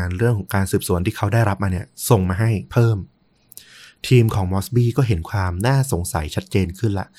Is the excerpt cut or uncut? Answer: uncut